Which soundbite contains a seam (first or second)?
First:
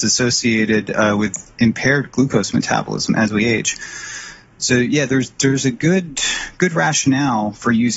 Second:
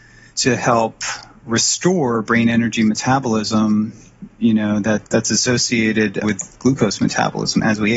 second